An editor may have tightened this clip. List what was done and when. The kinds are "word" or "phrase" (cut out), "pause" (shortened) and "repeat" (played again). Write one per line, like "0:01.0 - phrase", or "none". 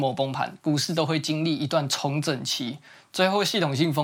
none